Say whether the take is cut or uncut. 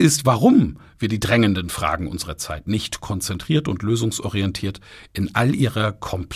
uncut